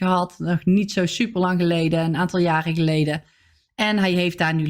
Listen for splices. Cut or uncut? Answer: uncut